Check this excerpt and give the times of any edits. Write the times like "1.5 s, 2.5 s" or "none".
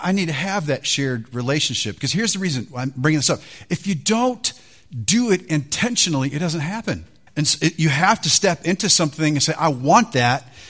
7.3 s